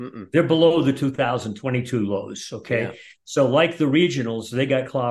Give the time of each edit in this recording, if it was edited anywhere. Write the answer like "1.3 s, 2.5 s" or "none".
none